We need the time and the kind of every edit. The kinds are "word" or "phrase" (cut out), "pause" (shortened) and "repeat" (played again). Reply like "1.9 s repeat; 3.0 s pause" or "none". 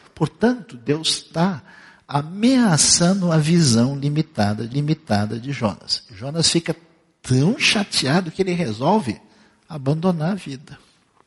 4.7 s repeat